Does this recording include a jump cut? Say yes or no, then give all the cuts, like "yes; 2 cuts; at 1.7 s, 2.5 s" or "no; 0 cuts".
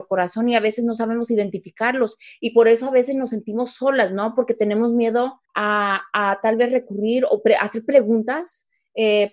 yes; 1 cut; at 5.5 s